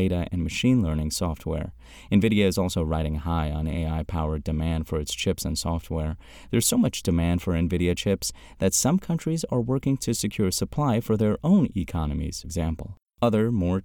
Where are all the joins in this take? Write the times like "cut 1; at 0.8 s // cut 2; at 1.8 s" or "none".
cut 1; at 12.4 s